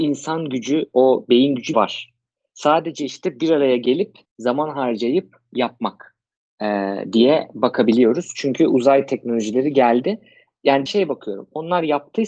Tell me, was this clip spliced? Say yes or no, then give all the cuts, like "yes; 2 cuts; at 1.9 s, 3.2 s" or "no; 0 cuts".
yes; 3 cuts; at 1.7 s, 4.2 s, 10.9 s